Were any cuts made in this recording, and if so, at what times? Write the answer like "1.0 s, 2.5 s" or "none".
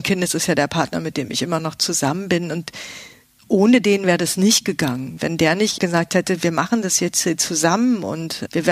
5.8 s

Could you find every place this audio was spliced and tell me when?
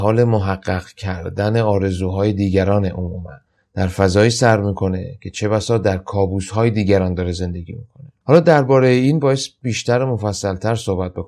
3.5 s, 8.2 s

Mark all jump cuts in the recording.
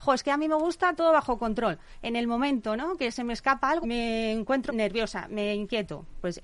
1.0 s, 3.8 s, 4.7 s

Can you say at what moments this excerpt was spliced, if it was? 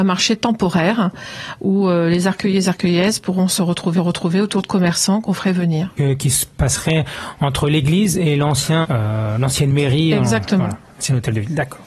4.0 s, 6.0 s, 8.8 s

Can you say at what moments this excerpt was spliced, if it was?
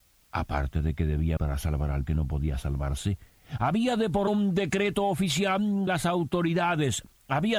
1.4 s, 2.1 s, 4.3 s, 5.9 s

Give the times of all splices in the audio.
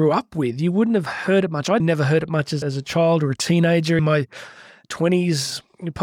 1.8 s, 2.6 s, 4.0 s

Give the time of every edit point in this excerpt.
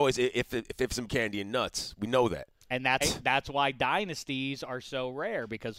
1.1 s, 3.0 s

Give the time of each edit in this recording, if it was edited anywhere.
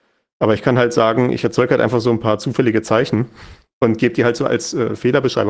none

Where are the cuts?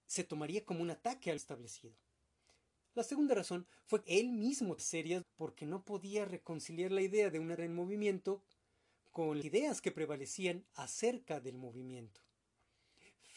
1.4 s, 4.0 s, 4.8 s, 5.2 s, 7.6 s, 9.4 s

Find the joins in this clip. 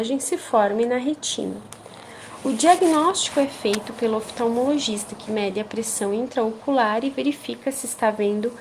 none

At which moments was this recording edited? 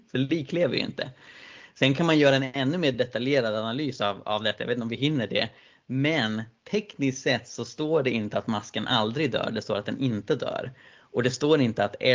none

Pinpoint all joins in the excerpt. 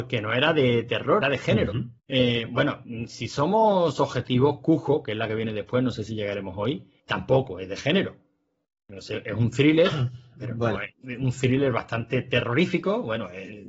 1.2 s, 2.0 s, 7.0 s, 10.9 s

